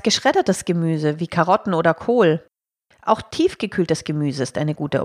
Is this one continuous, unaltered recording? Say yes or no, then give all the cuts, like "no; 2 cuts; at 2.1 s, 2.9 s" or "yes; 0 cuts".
yes; 0 cuts